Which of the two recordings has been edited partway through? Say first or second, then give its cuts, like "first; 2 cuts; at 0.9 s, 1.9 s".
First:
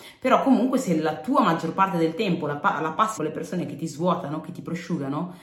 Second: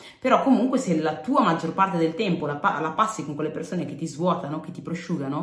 first; 1 cut; at 3.2 s